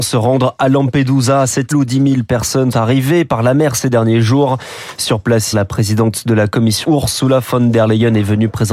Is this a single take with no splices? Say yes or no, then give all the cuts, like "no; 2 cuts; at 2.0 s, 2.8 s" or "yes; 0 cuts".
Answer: no; 4 cuts; at 1.7 s, 2.7 s, 5.5 s, 6.8 s